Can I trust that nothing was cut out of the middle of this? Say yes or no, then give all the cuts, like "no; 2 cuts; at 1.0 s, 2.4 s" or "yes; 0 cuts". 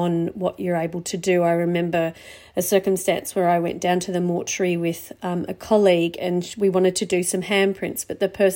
yes; 0 cuts